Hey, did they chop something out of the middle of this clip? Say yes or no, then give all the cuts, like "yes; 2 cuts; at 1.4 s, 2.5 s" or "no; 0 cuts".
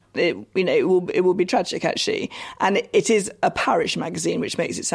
no; 0 cuts